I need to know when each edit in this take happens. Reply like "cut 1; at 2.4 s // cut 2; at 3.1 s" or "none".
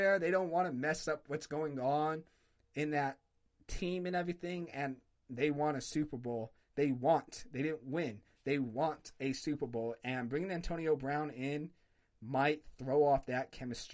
none